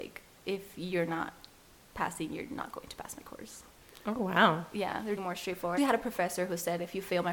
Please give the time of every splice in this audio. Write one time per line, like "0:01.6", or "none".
0:05.2
0:05.8